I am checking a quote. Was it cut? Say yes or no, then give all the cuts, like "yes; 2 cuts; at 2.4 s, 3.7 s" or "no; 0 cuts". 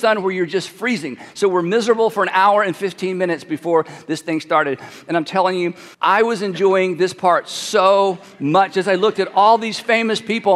yes; 1 cut; at 5.9 s